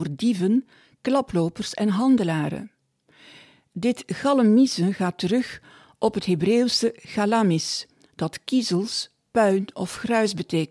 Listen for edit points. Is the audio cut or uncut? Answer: uncut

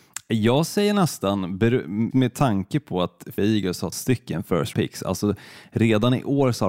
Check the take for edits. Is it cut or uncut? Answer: cut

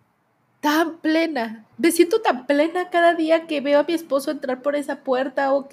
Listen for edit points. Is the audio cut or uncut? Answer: cut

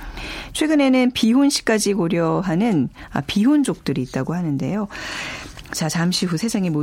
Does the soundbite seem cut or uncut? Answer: uncut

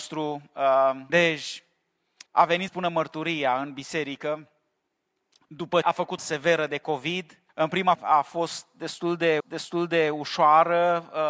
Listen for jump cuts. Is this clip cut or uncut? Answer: cut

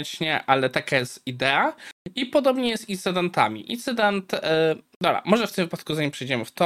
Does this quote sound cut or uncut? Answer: uncut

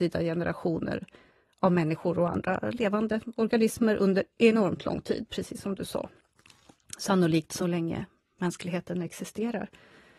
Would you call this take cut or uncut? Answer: uncut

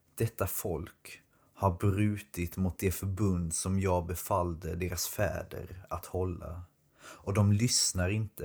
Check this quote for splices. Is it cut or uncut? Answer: uncut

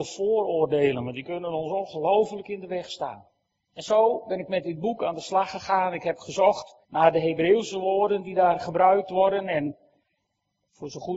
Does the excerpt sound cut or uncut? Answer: cut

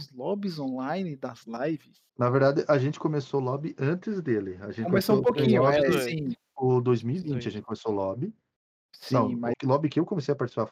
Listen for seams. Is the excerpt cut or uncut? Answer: cut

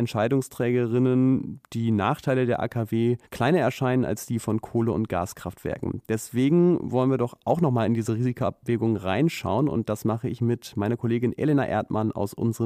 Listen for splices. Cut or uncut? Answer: cut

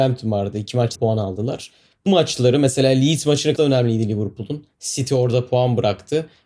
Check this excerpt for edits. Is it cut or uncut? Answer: cut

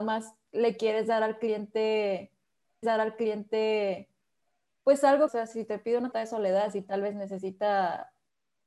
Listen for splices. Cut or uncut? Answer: cut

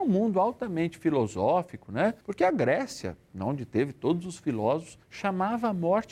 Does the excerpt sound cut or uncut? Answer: cut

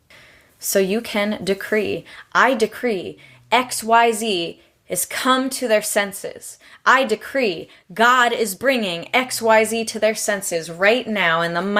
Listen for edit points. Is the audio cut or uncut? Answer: uncut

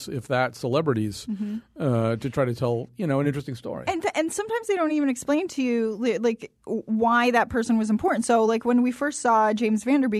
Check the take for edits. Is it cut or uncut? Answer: uncut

